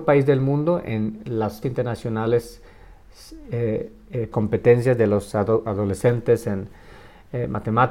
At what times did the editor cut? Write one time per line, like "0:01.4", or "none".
0:01.6
0:04.3

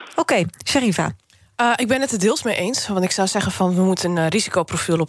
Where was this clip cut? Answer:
none

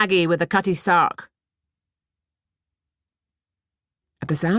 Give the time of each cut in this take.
none

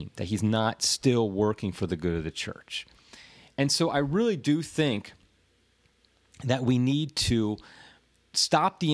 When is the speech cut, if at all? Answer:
none

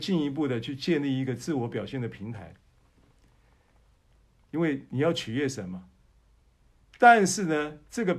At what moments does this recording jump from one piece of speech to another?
none

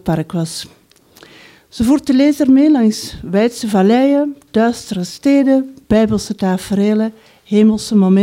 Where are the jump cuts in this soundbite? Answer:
none

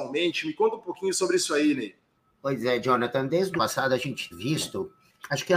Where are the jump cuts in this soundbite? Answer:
0:02.2
0:03.6
0:04.3

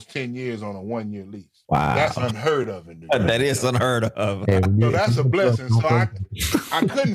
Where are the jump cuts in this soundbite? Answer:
0:01.6

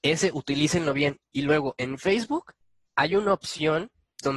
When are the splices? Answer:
0:02.9

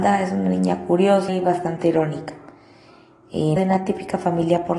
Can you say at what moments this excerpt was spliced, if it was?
0:01.3
0:03.6

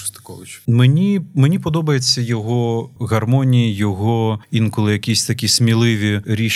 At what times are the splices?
none

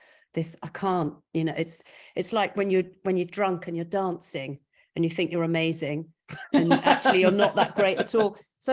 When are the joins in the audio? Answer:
none

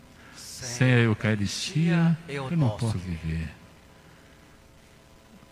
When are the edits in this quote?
0:02.5
0:02.9

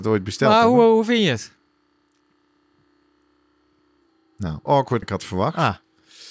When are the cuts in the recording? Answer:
0:04.7
0:05.0

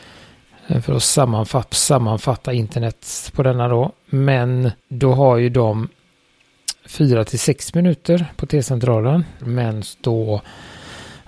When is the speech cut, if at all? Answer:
0:01.7
0:04.8
0:06.7

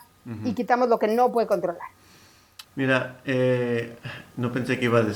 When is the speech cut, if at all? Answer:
0:02.6

